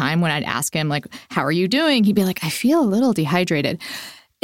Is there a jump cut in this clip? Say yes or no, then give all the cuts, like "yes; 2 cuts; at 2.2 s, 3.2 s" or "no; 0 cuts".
no; 0 cuts